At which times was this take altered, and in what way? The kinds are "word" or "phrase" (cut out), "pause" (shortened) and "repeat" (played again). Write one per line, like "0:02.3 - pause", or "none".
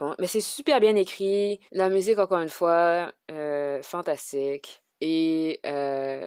0:01.7 - pause
0:04.9 - pause

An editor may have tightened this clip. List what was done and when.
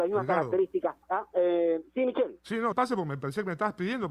0:01.0 - pause
0:02.7 - phrase

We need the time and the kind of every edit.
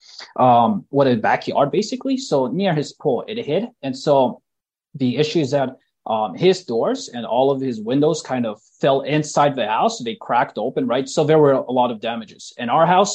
none

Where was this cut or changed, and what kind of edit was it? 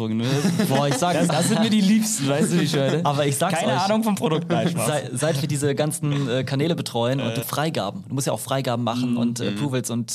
0:01.3 - word
0:07.4 - phrase

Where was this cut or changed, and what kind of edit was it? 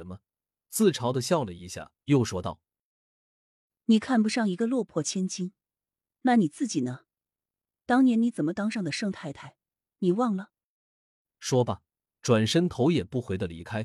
0:02.0 - pause

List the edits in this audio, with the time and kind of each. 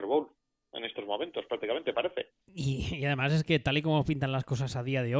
0:02.4 - pause

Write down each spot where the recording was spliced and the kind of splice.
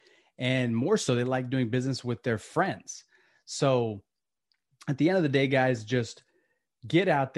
none

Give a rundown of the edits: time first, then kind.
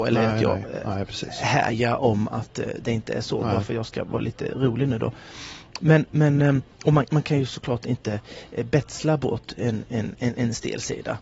0:06.7 - pause

